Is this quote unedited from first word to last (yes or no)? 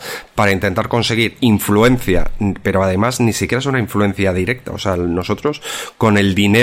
yes